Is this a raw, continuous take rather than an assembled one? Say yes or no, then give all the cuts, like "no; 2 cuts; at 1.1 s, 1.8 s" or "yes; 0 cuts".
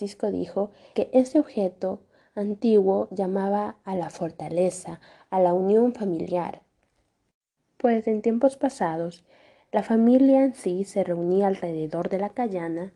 no; 1 cut; at 0.9 s